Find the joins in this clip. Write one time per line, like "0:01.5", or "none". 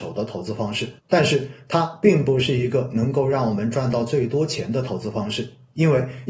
0:01.0